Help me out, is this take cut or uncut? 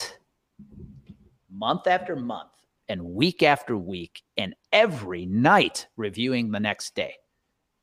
uncut